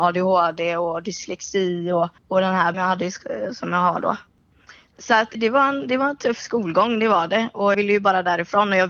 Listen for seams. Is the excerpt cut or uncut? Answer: cut